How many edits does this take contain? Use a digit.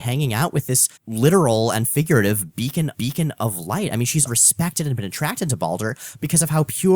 3